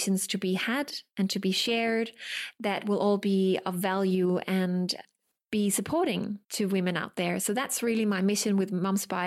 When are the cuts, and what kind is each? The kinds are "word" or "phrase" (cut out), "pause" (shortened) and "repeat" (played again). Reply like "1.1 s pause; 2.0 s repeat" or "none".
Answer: 6.4 s pause

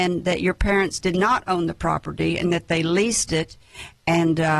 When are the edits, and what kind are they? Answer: none

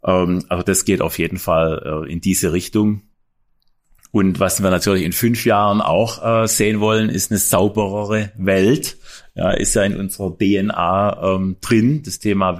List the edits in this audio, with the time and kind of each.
none

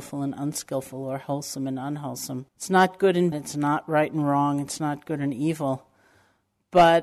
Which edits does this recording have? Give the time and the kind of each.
2.5 s pause; 3.3 s word

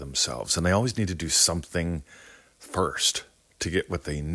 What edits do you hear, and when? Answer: none

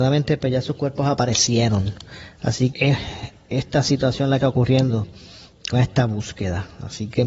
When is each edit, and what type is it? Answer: 2.7 s word; 4.4 s word; 5.7 s word

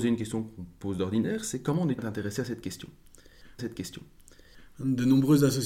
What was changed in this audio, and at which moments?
2.0 s word; 3.6 s repeat

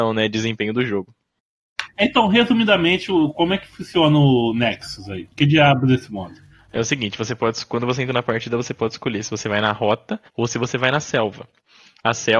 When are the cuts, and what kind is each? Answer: 5.3 s pause; 10.3 s pause

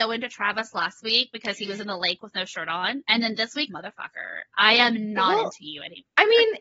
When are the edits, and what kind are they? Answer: 3.7 s phrase

